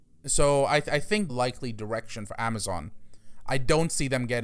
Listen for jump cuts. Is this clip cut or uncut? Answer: cut